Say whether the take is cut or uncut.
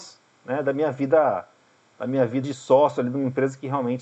cut